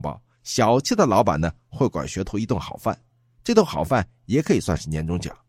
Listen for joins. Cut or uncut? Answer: uncut